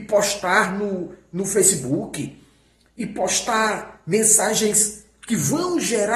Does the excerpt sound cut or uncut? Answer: uncut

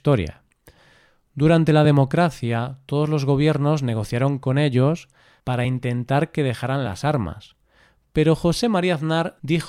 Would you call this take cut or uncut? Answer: uncut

